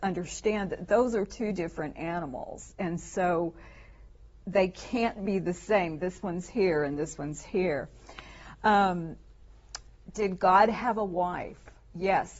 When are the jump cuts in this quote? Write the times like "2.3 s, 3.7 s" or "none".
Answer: none